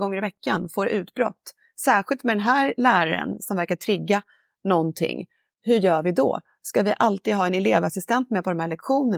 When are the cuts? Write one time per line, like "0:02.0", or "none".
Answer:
none